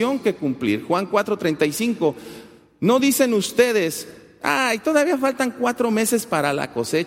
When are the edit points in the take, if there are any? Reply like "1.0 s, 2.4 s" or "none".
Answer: none